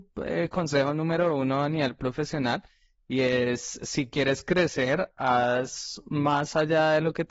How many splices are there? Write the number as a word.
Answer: zero